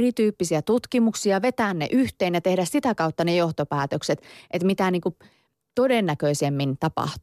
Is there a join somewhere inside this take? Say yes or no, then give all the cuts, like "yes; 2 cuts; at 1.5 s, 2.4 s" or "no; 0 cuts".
no; 0 cuts